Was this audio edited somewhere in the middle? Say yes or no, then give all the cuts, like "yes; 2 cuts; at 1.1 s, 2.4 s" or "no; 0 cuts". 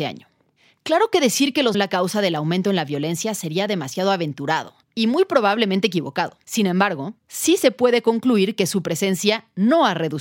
yes; 4 cuts; at 1.7 s, 4.8 s, 6.4 s, 7.2 s